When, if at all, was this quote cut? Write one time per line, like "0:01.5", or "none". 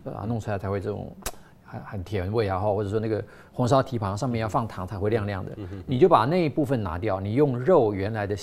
none